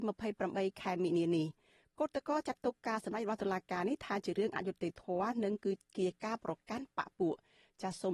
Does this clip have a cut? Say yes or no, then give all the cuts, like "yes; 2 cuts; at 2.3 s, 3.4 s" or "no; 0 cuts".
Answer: no; 0 cuts